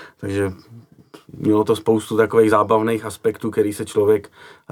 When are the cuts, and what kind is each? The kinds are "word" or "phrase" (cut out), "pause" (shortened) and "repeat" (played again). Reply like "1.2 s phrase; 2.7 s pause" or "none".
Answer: none